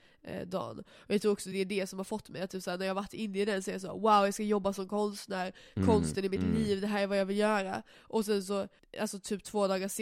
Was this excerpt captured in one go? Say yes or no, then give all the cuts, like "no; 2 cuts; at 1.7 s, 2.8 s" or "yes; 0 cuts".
yes; 0 cuts